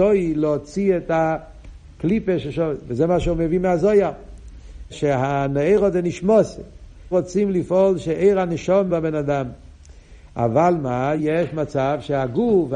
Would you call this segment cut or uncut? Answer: cut